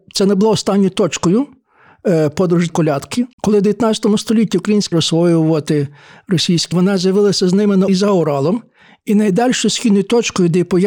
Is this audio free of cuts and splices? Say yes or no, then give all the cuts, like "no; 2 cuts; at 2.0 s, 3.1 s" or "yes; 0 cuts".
no; 5 cuts; at 2.7 s, 3.3 s, 4.9 s, 6.7 s, 7.9 s